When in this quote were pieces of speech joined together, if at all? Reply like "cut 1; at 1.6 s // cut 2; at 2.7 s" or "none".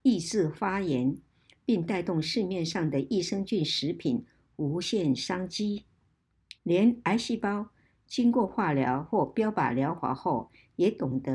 cut 1; at 6.6 s